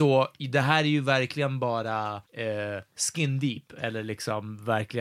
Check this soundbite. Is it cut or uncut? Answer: cut